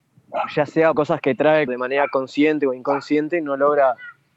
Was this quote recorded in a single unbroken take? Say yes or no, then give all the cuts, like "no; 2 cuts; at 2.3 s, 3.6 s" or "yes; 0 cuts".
no; 2 cuts; at 0.9 s, 1.7 s